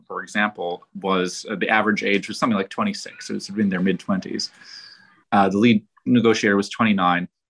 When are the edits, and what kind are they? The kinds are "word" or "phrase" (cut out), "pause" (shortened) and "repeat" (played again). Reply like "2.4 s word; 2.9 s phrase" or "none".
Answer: none